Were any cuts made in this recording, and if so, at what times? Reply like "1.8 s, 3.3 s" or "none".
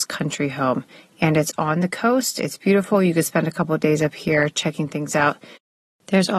none